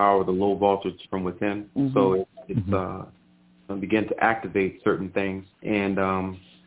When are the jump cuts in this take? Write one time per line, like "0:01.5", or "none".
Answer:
0:01.1
0:01.7
0:03.7
0:05.5